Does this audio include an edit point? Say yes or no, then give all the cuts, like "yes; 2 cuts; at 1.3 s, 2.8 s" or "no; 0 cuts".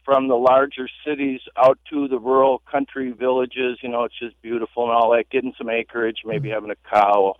yes; 1 cut; at 1.8 s